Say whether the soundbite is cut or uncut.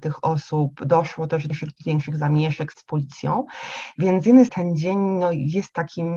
cut